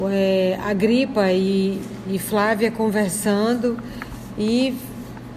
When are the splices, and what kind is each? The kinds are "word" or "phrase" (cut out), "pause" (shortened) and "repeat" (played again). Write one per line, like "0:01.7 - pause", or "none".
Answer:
none